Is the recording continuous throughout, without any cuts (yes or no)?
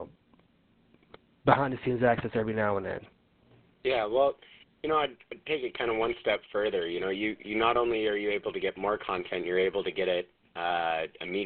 yes